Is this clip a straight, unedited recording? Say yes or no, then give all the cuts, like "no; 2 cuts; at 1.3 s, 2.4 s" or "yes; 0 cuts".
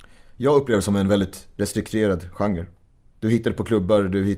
yes; 0 cuts